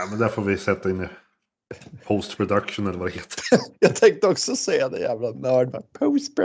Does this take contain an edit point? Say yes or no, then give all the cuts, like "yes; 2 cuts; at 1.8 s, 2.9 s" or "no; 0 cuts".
no; 0 cuts